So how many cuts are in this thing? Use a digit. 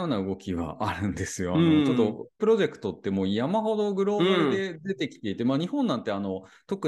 1